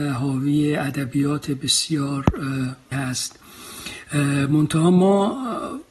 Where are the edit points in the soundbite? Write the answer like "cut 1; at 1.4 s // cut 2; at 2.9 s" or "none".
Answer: cut 1; at 2.9 s